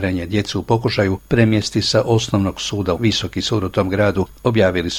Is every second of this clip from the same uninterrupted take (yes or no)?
no